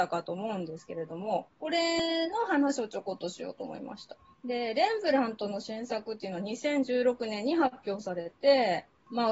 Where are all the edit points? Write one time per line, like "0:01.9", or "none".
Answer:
none

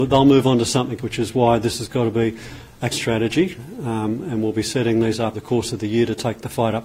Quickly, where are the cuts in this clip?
0:01.0
0:02.9
0:05.3

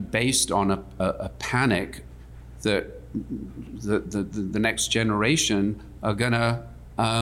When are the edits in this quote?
none

